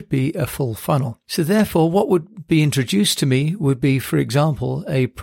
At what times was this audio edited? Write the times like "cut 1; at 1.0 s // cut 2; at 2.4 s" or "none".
cut 1; at 1.2 s